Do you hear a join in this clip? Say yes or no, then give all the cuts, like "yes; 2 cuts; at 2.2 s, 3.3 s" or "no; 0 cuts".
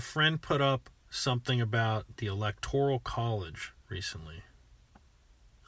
no; 0 cuts